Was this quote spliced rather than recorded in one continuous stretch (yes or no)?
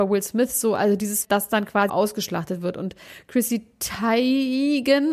yes